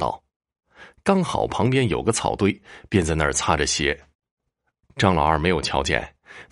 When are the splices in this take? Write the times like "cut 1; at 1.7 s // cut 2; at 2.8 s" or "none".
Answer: cut 1; at 4.1 s